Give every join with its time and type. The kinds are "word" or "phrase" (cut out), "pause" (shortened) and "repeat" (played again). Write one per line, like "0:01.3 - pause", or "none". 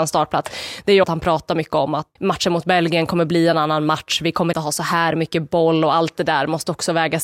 0:01.0 - word
0:02.2 - word
0:04.5 - word